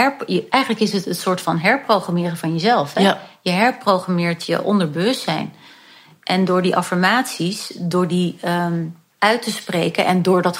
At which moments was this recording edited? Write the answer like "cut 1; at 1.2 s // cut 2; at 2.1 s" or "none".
cut 1; at 9.1 s